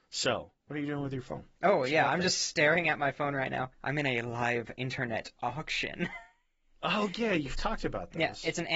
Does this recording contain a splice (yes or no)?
yes